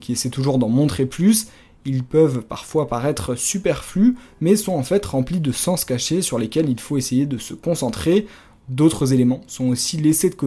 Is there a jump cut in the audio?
no; 0 cuts

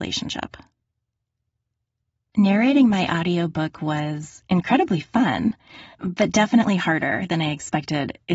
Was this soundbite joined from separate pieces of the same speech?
yes; 1 cut; at 5.9 s

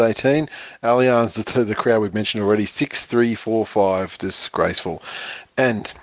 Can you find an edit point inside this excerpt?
no; 0 cuts

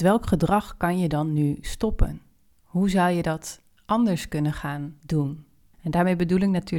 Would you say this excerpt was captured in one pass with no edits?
yes; 0 cuts

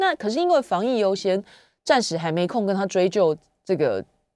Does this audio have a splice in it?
no; 0 cuts

